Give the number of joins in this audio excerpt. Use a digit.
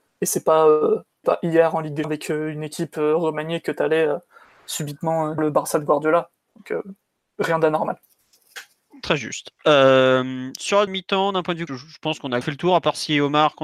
6